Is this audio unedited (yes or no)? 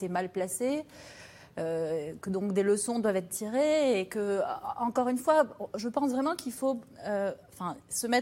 yes